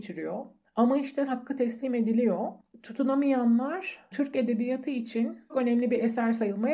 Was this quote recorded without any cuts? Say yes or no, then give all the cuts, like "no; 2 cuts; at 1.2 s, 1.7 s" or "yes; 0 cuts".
no; 3 cuts; at 1.3 s, 4.1 s, 5.5 s